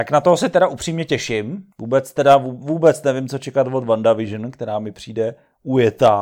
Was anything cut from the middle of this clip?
yes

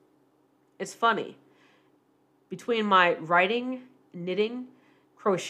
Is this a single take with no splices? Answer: yes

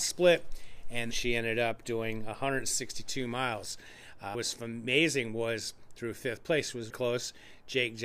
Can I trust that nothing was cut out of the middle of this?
no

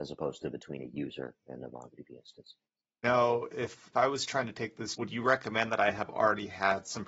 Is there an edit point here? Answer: yes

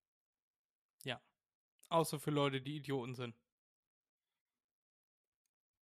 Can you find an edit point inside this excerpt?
no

